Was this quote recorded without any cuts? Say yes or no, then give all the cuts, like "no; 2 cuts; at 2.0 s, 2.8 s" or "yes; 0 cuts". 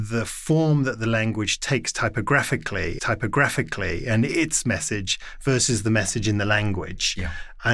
no; 1 cut; at 3.0 s